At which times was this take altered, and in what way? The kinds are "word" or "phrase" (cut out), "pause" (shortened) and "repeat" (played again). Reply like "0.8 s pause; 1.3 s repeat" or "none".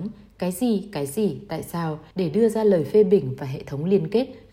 2.1 s pause